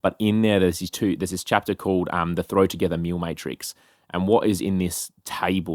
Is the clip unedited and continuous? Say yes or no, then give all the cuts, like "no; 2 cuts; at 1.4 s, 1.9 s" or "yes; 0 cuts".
yes; 0 cuts